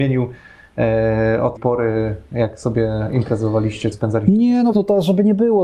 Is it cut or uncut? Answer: cut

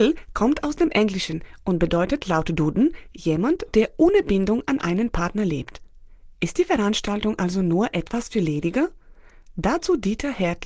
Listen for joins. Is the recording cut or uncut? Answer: uncut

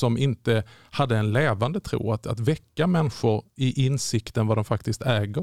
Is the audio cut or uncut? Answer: uncut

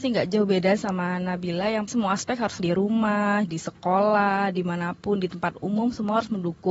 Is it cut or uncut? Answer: cut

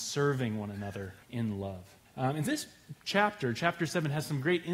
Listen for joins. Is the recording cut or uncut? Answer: cut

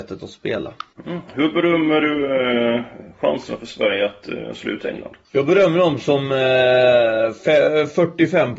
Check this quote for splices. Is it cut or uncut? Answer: cut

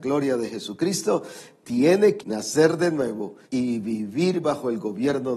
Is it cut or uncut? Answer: cut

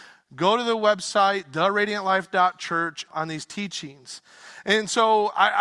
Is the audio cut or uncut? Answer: cut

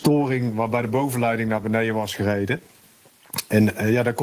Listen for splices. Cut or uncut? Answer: uncut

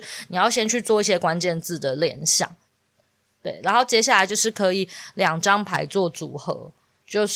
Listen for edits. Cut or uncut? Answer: uncut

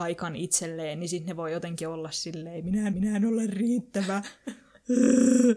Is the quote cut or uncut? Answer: cut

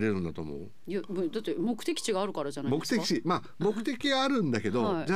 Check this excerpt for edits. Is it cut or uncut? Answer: uncut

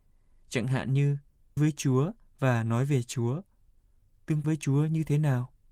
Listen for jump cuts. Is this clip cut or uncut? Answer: cut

